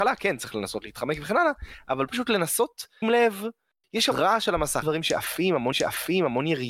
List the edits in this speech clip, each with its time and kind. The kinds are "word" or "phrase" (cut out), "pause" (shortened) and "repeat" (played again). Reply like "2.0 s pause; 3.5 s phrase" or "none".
2.1 s word; 3.0 s word; 4.1 s word; 4.8 s word; 5.7 s repeat